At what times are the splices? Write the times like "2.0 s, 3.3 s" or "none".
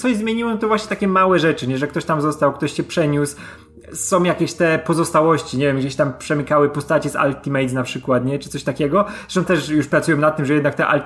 9.5 s